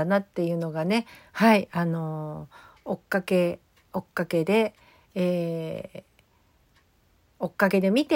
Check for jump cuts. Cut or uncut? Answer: uncut